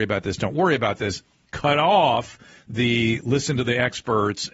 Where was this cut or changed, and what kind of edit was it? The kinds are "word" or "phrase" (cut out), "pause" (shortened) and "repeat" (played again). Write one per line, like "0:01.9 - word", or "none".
none